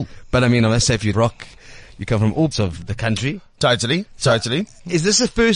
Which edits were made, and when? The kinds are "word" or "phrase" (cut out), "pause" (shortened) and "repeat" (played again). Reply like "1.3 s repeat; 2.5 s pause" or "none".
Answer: 1.1 s word; 2.5 s word